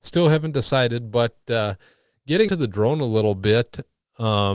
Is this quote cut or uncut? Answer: cut